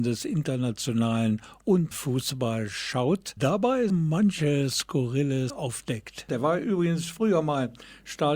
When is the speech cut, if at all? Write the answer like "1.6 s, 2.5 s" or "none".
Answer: 1.9 s, 3.4 s, 3.9 s, 5.5 s